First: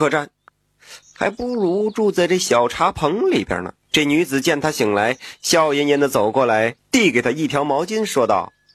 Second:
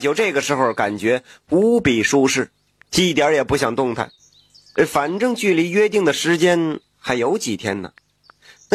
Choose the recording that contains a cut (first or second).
first